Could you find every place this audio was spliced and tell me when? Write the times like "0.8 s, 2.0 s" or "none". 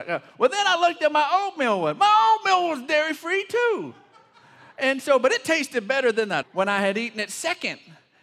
6.4 s

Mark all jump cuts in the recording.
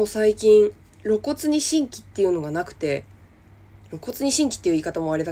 none

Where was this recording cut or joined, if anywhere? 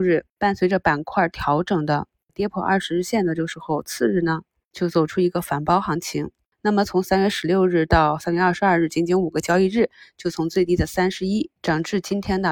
11.6 s

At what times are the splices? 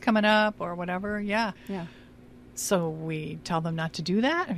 1.6 s

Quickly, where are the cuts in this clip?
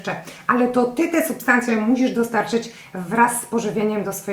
1.7 s

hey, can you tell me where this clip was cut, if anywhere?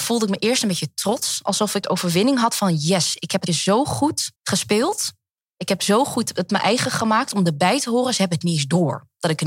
1.8 s, 3.5 s, 4.4 s

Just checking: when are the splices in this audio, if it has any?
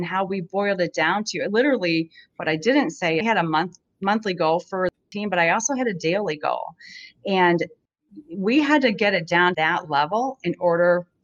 3.2 s, 9.5 s

